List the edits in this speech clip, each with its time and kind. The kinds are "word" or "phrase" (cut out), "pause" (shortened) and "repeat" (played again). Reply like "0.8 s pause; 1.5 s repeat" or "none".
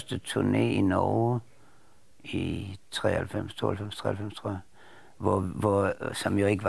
none